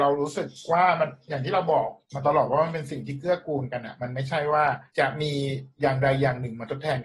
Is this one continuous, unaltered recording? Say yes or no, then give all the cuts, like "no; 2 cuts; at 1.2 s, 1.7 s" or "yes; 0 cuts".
no; 3 cuts; at 2.0 s, 4.9 s, 5.7 s